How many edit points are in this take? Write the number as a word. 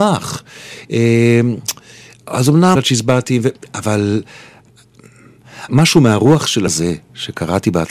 three